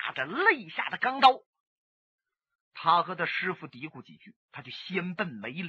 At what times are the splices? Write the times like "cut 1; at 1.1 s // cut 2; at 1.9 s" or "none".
none

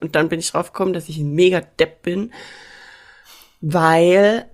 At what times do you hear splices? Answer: none

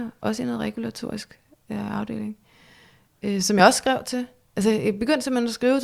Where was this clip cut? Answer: none

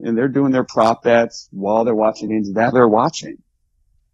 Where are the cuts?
cut 1; at 2.3 s // cut 2; at 2.7 s

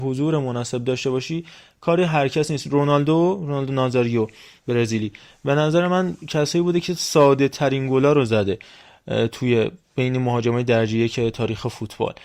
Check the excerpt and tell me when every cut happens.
none

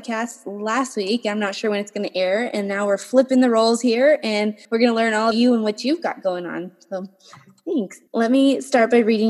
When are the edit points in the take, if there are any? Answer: cut 1; at 4.6 s // cut 2; at 5.3 s // cut 3; at 8.1 s

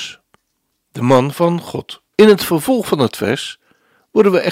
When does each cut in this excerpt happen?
cut 1; at 2.1 s

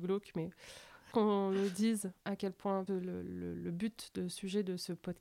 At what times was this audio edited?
cut 1; at 1.1 s // cut 2; at 2.2 s // cut 3; at 2.9 s

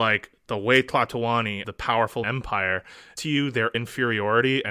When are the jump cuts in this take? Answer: cut 1; at 1.6 s // cut 2; at 2.2 s // cut 3; at 3.2 s // cut 4; at 3.7 s

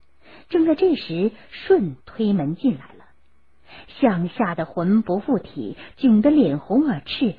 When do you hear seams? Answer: cut 1; at 2.0 s

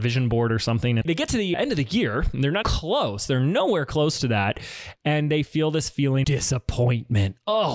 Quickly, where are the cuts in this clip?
cut 1; at 1.0 s // cut 2; at 2.6 s // cut 3; at 6.2 s

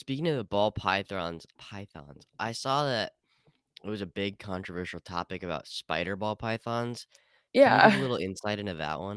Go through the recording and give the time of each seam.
cut 1; at 1.6 s

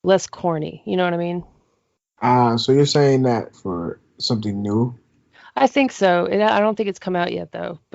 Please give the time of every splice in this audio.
cut 1; at 3.5 s

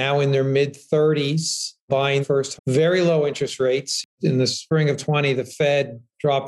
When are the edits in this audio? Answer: cut 1; at 2.2 s // cut 2; at 2.6 s

